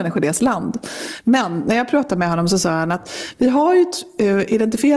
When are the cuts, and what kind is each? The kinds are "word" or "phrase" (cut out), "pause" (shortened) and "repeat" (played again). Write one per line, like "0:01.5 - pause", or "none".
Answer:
none